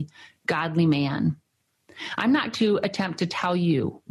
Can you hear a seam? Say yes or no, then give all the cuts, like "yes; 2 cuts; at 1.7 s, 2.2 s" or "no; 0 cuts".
yes; 1 cut; at 2.5 s